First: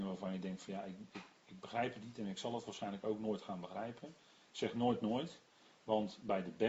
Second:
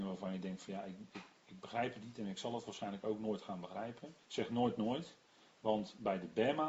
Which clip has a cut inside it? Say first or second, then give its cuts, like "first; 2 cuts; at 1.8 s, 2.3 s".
second; 1 cut; at 4.2 s